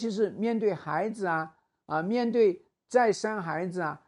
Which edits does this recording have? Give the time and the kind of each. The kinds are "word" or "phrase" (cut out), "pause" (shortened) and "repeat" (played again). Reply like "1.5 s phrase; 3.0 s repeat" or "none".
none